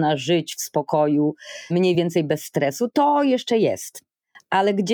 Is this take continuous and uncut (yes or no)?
yes